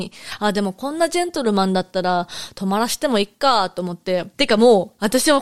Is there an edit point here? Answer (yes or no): yes